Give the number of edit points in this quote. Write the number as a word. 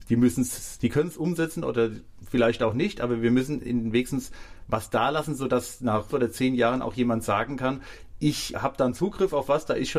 two